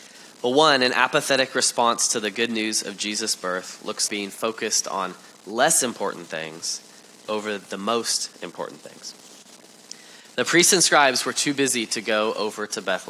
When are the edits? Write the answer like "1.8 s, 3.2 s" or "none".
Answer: 4.1 s